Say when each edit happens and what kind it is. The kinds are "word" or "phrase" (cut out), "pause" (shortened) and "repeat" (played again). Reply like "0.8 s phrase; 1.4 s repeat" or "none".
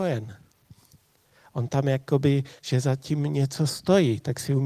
2.6 s word